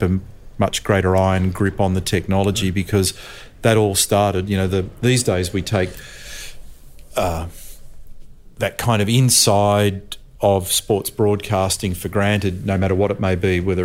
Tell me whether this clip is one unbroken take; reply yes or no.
no